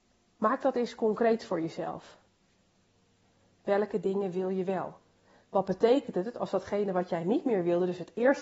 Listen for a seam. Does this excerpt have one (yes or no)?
no